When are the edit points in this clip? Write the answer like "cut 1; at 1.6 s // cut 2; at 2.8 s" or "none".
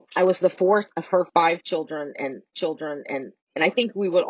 cut 1; at 2.5 s

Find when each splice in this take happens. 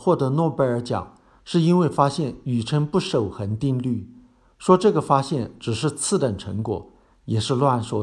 none

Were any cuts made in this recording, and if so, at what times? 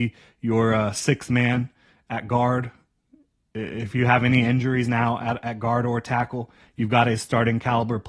none

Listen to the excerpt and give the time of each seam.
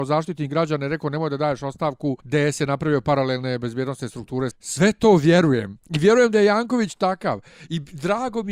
cut 1; at 2.2 s // cut 2; at 4.5 s // cut 3; at 5.8 s

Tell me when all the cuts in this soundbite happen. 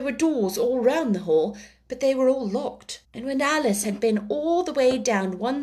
cut 1; at 3.0 s

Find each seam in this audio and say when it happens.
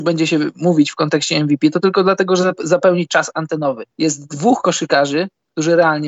cut 1; at 3.9 s

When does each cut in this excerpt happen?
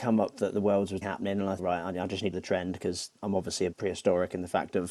cut 1; at 1.0 s // cut 2; at 1.6 s // cut 3; at 2.3 s // cut 4; at 3.2 s // cut 5; at 3.7 s

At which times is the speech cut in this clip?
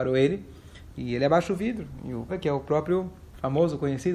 cut 1; at 2.3 s

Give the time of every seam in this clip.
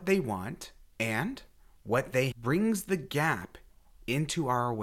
cut 1; at 2.3 s

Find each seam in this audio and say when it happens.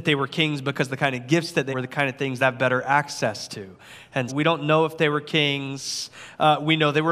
cut 1; at 1.7 s // cut 2; at 2.4 s // cut 3; at 4.3 s

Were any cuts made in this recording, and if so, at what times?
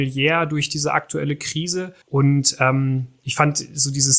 cut 1; at 2.0 s

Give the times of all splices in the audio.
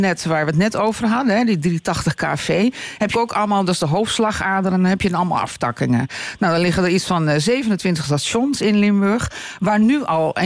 cut 1; at 3.1 s

